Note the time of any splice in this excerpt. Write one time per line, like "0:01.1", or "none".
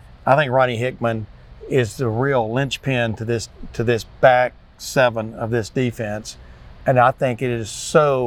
none